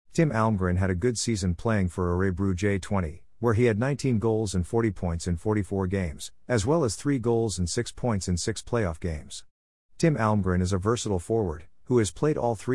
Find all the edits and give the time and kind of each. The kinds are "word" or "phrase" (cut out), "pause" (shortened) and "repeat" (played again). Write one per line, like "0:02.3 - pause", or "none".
none